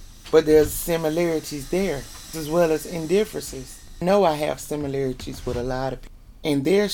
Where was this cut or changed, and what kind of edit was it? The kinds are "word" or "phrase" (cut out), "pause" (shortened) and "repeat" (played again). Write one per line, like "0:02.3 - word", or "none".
0:02.3 - word